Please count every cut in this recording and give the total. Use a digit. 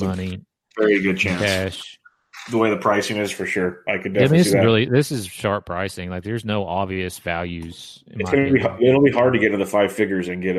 0